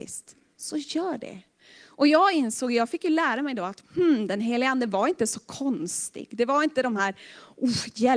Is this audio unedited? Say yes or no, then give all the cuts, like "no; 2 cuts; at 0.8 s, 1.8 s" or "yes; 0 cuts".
yes; 0 cuts